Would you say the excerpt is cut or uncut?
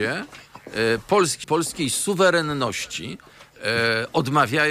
cut